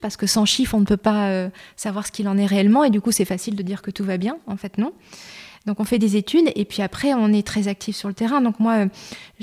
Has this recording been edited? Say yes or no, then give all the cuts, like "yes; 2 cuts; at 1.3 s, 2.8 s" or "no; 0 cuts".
no; 0 cuts